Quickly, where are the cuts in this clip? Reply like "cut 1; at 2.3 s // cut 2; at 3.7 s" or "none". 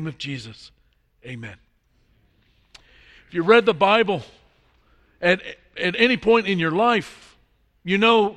none